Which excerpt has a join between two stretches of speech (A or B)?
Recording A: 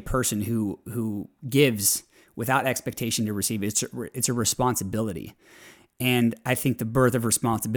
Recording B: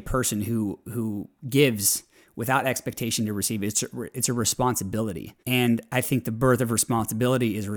B